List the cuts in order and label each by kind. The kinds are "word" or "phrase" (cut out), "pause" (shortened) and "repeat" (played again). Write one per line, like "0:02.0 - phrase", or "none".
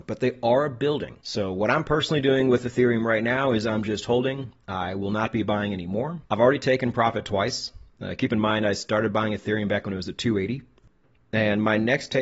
0:01.2 - pause
0:06.3 - pause